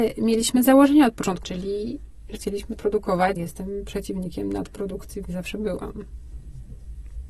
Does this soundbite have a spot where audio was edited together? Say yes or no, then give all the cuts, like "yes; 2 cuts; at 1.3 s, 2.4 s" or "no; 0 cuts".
yes; 5 cuts; at 1.4 s, 2.4 s, 2.8 s, 3.4 s, 5.2 s